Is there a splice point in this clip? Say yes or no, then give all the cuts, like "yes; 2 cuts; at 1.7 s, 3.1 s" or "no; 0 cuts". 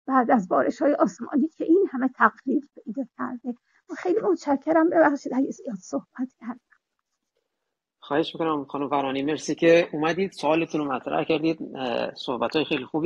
no; 0 cuts